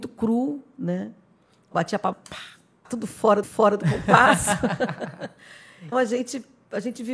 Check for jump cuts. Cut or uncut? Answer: cut